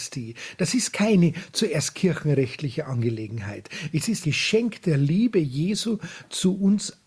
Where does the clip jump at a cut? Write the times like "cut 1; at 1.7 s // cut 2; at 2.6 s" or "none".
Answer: cut 1; at 4.2 s